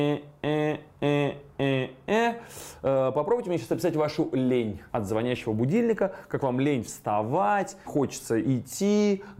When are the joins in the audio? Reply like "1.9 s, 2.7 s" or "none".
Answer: 4.9 s, 7.8 s